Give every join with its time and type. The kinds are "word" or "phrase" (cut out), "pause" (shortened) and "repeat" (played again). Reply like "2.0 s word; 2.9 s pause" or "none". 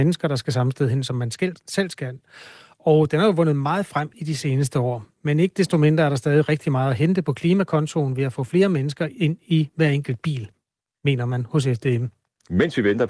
none